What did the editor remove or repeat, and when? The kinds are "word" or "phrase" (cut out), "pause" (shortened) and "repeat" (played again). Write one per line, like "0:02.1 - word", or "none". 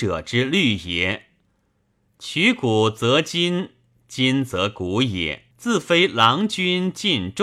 0:05.5 - pause